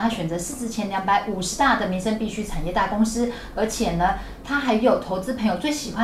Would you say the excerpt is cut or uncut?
uncut